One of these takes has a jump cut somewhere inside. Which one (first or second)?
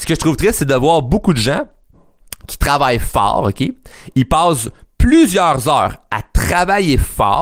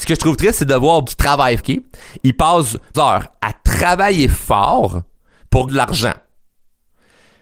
second